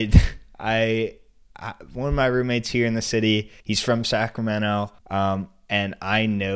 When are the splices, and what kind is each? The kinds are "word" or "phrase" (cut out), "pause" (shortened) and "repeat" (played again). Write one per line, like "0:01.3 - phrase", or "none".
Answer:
0:03.6 - pause
0:05.0 - pause